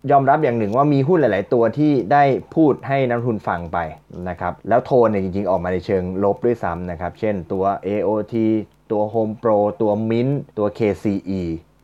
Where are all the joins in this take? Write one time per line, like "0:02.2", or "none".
0:04.6
0:10.5